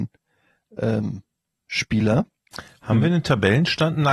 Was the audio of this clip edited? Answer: no; 0 cuts

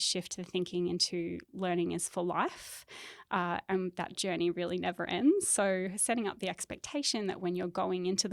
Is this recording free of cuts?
no; 1 cut; at 1.4 s

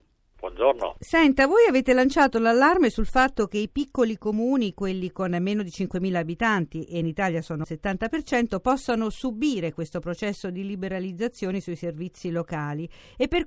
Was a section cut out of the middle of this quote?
yes; 1 cut; at 7.6 s

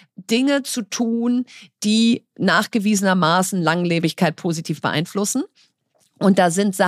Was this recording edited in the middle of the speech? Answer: no; 0 cuts

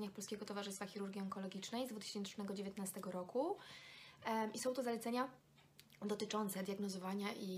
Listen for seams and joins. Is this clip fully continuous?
yes; 0 cuts

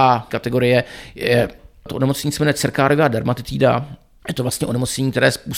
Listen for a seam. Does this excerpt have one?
no; 0 cuts

